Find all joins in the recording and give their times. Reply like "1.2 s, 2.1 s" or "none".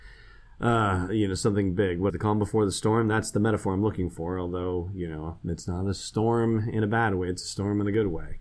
2.1 s